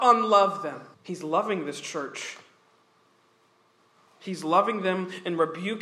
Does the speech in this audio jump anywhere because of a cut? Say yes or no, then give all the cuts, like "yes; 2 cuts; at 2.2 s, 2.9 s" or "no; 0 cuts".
yes; 1 cut; at 0.9 s